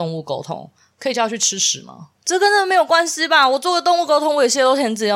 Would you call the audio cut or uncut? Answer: cut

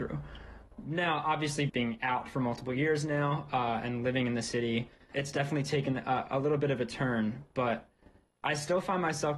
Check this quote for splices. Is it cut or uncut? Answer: cut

